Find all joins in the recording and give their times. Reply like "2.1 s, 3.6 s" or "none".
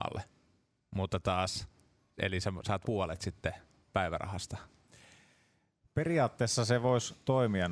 2.8 s

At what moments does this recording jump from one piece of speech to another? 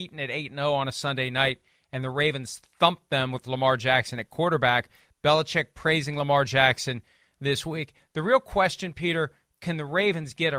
none

